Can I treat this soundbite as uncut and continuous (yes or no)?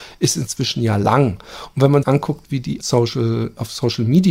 no